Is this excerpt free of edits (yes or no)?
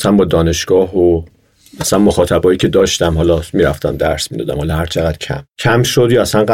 yes